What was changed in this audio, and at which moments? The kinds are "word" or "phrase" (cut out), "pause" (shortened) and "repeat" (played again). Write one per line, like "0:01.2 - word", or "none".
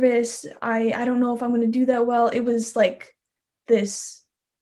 none